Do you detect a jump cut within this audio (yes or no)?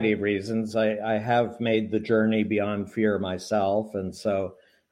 no